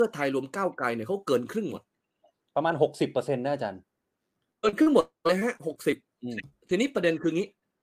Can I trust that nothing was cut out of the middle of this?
yes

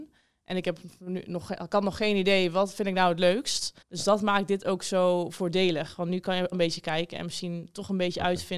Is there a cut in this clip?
yes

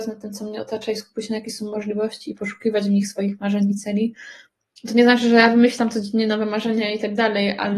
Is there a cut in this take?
no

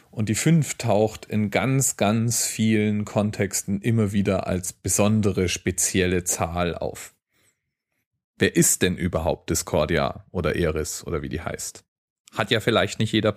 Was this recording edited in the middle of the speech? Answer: no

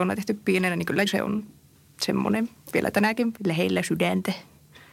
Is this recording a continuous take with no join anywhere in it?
no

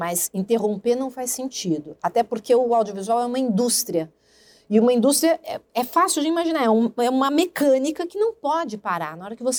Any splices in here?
no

